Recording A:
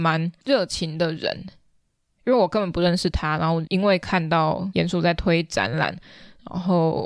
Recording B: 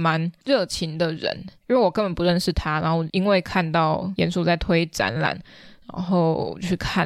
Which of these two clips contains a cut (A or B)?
B